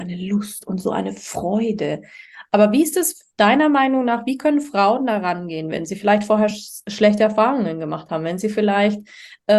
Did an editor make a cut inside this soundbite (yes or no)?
no